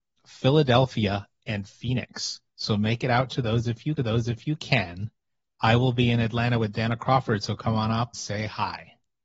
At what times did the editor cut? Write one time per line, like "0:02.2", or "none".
0:02.5
0:04.0
0:08.1